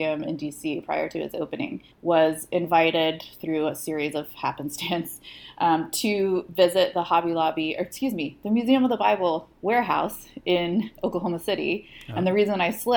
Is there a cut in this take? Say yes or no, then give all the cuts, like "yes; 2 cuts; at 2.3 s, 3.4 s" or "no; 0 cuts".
yes; 1 cut; at 1.9 s